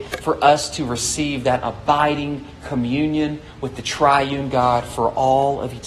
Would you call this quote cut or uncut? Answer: uncut